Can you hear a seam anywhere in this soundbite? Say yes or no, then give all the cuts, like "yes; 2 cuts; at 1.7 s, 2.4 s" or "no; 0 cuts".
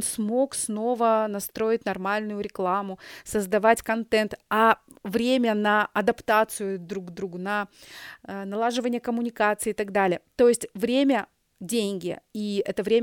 no; 0 cuts